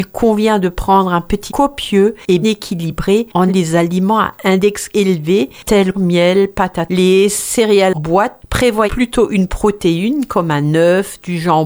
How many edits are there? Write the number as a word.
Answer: eight